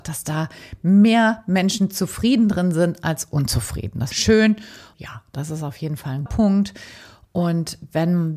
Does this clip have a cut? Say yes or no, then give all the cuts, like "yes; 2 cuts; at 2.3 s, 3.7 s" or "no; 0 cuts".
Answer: yes; 3 cuts; at 4.1 s, 4.9 s, 6.3 s